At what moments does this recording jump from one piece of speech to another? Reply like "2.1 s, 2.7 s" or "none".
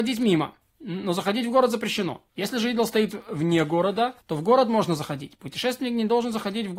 2.3 s, 4.2 s